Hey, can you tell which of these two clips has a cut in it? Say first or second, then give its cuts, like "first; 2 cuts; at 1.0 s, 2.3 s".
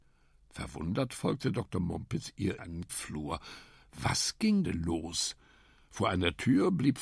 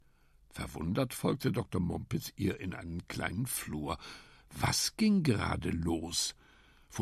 first; 3 cuts; at 2.6 s, 2.9 s, 4.6 s